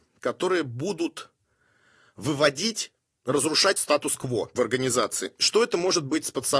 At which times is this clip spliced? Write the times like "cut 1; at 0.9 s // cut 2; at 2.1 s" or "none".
none